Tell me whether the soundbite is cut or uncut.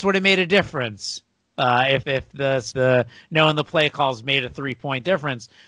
cut